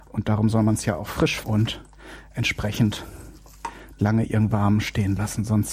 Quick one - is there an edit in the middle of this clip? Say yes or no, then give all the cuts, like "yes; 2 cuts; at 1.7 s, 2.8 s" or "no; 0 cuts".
yes; 3 cuts; at 1.4 s, 4.0 s, 4.5 s